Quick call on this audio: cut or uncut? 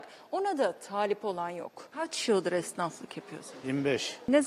uncut